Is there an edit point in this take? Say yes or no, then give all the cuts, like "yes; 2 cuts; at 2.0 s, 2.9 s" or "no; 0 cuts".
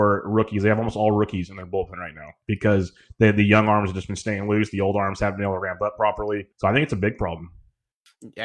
yes; 1 cut; at 6.5 s